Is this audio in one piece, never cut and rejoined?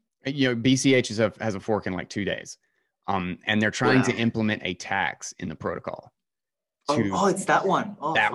yes; 0 cuts

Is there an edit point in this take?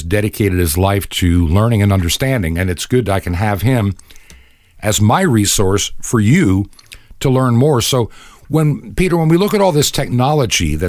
no; 0 cuts

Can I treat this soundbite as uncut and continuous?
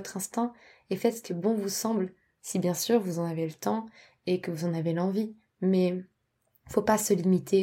yes; 0 cuts

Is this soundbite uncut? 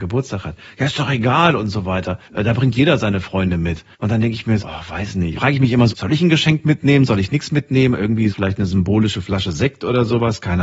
no; 6 cuts; at 2.2 s, 3.9 s, 4.6 s, 5.4 s, 5.9 s, 8.3 s

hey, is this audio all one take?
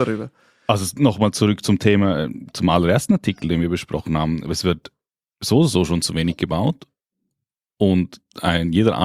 no; 1 cut; at 5.2 s

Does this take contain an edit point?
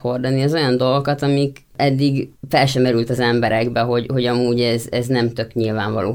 no; 0 cuts

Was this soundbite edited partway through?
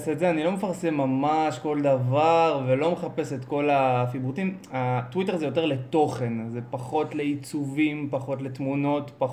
no; 0 cuts

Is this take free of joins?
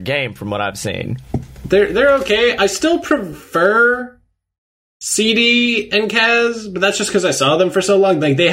yes; 0 cuts

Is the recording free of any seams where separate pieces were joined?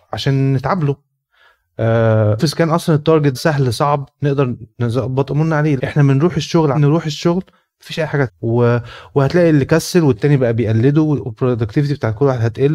no; 6 cuts; at 2.4 s, 3.3 s, 4.7 s, 5.8 s, 6.7 s, 8.3 s

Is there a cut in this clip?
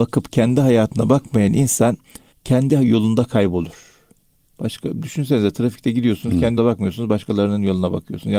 yes; 2 cuts; at 2.3 s, 6.6 s

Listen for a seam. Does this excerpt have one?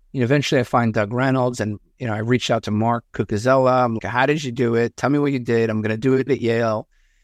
yes; 1 cut; at 4.0 s

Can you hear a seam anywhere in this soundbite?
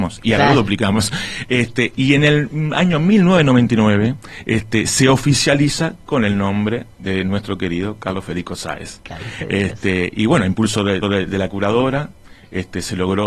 yes; 1 cut; at 11.0 s

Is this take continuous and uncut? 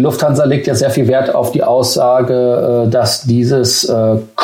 yes; 0 cuts

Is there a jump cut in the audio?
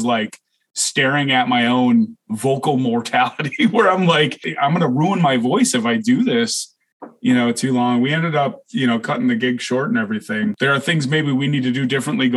no; 0 cuts

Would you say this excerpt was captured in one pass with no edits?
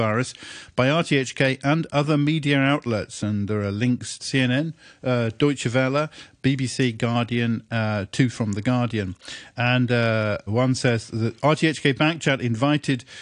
no; 2 cuts; at 4.2 s, 10.5 s

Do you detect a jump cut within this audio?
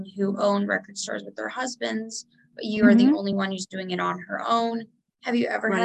no; 0 cuts

